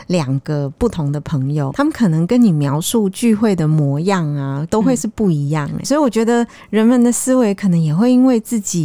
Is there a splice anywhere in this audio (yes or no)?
yes